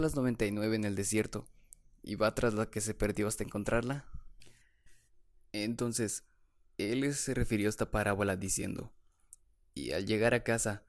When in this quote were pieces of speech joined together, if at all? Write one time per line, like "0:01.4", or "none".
none